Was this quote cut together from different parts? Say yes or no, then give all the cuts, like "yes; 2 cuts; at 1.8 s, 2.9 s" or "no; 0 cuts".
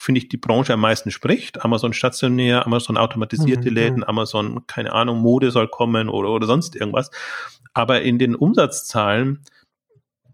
no; 0 cuts